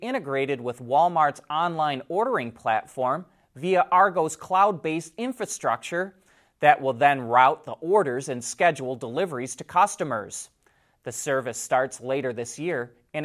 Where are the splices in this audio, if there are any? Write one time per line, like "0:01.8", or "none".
none